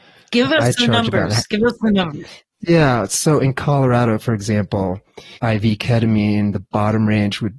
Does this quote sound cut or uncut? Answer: cut